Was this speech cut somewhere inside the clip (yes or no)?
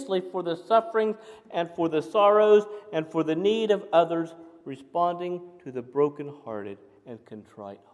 no